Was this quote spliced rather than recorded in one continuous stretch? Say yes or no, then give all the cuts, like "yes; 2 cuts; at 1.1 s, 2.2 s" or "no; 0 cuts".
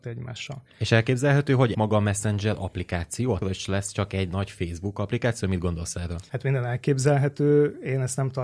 yes; 2 cuts; at 1.7 s, 3.4 s